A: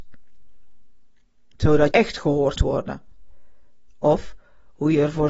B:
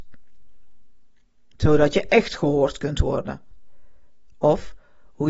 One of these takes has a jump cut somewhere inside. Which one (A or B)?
A